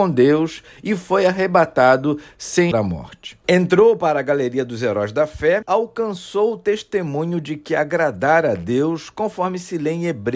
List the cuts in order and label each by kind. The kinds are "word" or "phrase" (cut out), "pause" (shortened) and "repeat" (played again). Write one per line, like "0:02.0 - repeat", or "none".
0:02.7 - word
0:05.6 - word